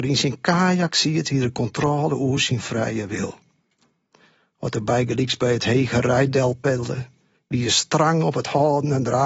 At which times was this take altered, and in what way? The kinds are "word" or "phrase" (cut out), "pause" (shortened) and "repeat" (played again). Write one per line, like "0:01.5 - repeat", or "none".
none